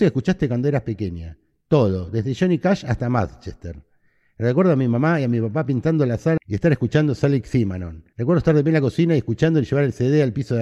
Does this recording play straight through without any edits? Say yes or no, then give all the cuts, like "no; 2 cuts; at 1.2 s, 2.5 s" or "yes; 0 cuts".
no; 1 cut; at 8.1 s